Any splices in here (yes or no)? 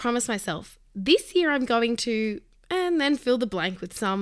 no